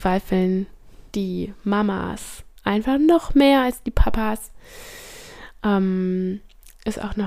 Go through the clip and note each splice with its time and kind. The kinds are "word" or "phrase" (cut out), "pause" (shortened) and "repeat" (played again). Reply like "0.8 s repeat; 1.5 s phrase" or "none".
1.1 s pause